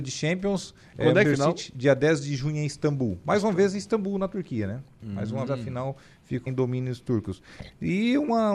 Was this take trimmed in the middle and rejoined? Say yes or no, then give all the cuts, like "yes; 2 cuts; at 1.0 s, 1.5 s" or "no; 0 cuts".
yes; 3 cuts; at 1.2 s, 5.5 s, 6.5 s